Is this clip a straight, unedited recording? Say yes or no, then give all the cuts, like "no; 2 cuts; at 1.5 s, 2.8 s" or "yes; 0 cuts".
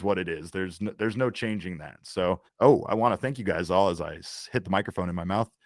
no; 1 cut; at 2.5 s